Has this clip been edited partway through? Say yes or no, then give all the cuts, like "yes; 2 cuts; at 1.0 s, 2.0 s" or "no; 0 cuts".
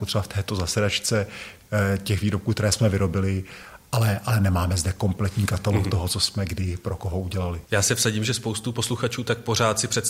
yes; 1 cut; at 7.6 s